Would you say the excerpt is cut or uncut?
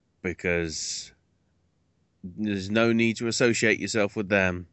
uncut